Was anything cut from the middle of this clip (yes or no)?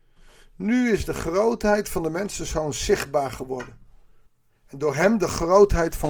yes